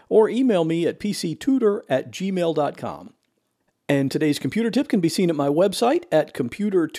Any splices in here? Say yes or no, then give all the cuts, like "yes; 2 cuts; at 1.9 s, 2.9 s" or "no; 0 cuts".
no; 0 cuts